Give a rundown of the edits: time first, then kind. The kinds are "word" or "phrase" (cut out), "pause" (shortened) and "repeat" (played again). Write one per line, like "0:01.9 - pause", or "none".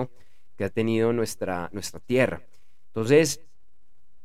none